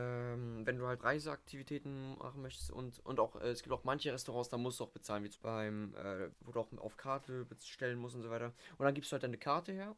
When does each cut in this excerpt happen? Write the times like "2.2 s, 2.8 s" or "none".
1.0 s, 5.4 s, 6.3 s